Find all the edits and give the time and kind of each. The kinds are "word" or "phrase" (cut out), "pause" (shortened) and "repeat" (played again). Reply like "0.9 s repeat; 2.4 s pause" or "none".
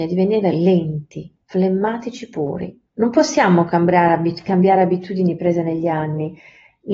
1.4 s pause; 2.9 s pause